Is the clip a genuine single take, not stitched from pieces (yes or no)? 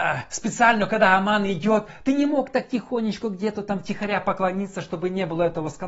yes